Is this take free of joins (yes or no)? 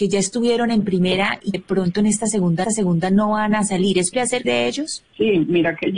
no